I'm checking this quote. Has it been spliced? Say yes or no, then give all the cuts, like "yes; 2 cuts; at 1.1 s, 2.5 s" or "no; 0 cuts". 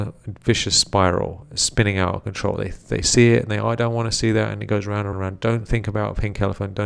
yes; 1 cut; at 5.1 s